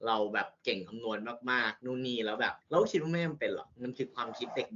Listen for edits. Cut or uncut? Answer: cut